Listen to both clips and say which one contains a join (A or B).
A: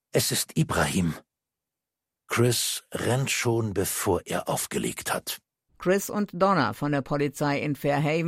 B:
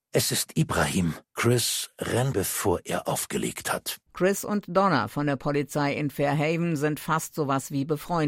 B